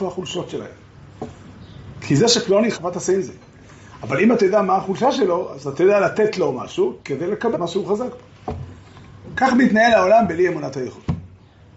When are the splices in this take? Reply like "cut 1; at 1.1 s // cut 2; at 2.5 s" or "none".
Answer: cut 1; at 2.7 s // cut 2; at 7.0 s // cut 3; at 7.5 s